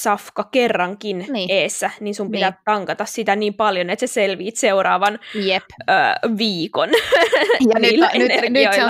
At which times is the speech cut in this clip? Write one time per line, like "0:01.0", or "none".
none